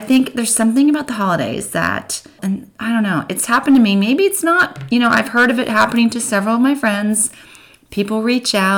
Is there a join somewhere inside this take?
yes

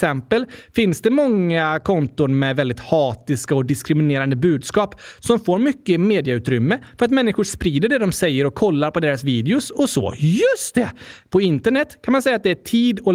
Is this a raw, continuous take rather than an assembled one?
yes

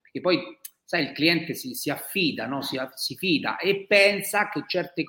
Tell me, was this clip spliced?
no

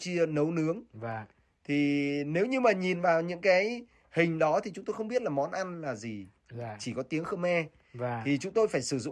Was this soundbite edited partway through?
no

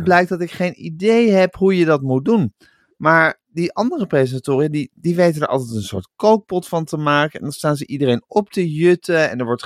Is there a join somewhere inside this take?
no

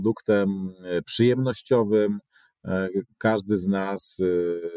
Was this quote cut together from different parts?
no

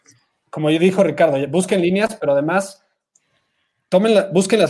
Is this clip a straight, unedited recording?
yes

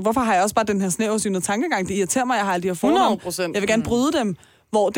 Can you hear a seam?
no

